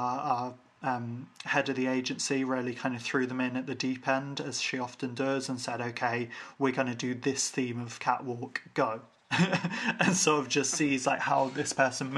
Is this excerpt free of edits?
yes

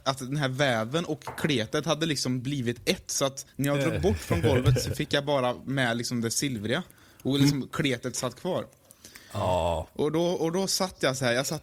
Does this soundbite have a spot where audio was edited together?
yes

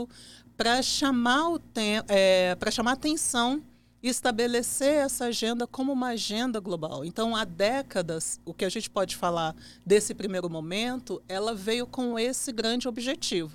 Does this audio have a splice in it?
no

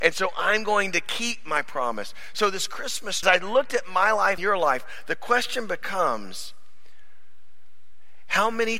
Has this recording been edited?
yes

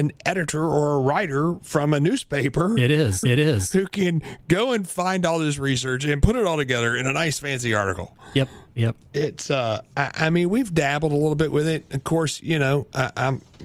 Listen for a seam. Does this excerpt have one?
yes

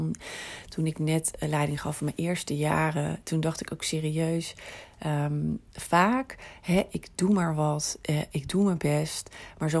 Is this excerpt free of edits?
yes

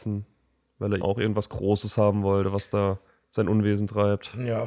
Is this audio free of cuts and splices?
no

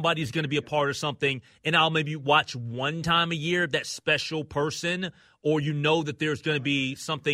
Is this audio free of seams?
yes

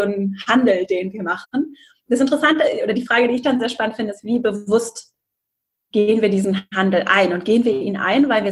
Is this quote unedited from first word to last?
yes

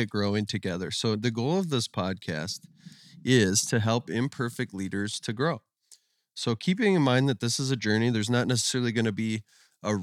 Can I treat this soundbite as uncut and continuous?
yes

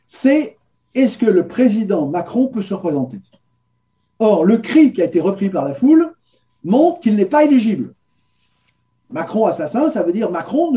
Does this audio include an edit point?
no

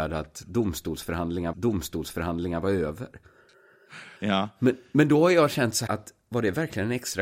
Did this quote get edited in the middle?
yes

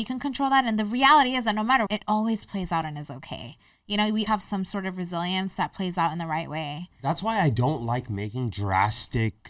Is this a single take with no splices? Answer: no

